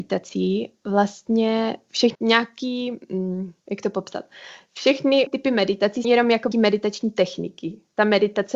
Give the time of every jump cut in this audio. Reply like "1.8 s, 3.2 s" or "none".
2.1 s, 3.6 s, 5.3 s, 6.0 s, 6.5 s